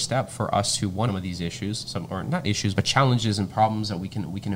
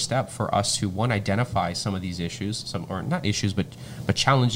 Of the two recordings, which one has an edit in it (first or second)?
first